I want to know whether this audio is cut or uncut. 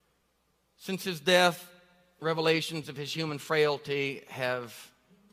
uncut